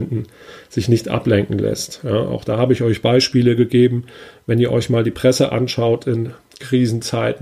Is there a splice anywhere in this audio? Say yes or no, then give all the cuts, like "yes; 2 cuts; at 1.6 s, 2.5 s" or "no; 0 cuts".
no; 0 cuts